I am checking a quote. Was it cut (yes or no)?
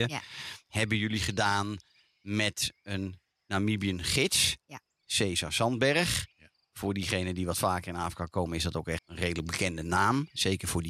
yes